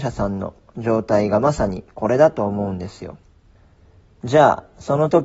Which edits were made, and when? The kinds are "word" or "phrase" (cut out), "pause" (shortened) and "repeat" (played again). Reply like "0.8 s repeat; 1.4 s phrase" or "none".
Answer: 3.5 s pause